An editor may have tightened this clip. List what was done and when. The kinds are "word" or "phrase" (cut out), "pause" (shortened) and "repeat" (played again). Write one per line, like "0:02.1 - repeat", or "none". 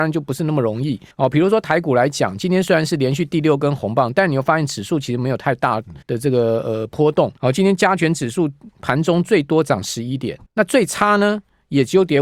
0:01.1 - pause
0:06.0 - pause
0:07.4 - pause
0:10.5 - pause